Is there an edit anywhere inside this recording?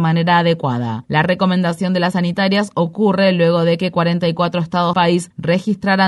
yes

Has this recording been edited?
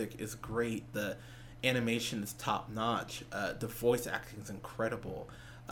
no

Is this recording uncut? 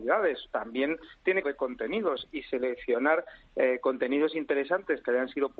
no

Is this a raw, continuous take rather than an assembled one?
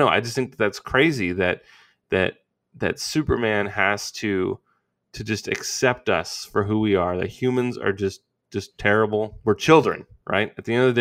yes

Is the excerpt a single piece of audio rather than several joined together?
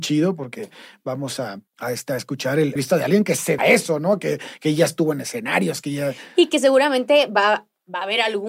no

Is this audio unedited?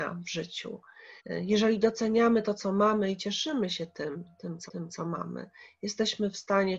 no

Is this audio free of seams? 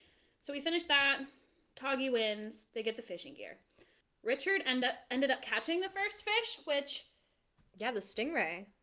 yes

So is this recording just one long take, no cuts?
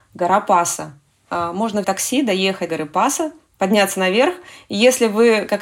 no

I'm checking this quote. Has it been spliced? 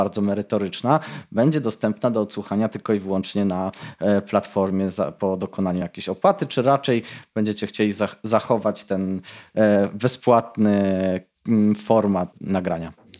no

